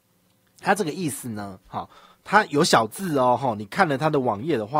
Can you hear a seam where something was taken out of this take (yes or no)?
no